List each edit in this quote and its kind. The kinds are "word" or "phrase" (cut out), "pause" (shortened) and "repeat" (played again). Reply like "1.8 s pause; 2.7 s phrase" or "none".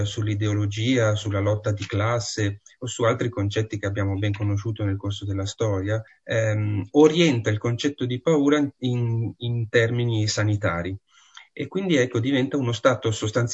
6.1 s pause